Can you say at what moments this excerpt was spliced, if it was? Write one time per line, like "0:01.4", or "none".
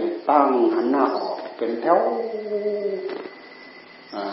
none